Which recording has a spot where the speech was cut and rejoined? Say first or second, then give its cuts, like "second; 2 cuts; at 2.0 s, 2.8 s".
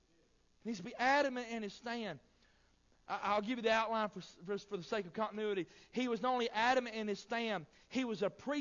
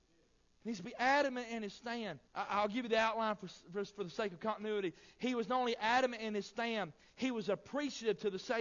second; 1 cut; at 2.3 s